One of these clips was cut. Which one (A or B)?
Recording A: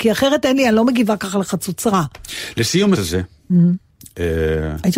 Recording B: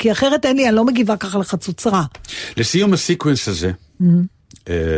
A